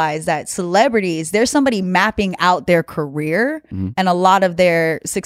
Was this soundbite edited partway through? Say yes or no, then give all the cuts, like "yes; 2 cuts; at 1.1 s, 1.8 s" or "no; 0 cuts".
no; 0 cuts